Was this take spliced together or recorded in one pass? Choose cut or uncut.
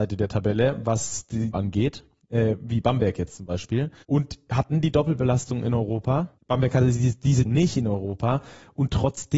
cut